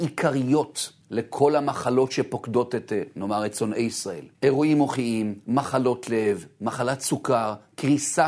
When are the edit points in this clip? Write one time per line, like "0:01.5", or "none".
0:01.0
0:04.3